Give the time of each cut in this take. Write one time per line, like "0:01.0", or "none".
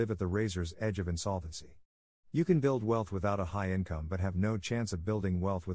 none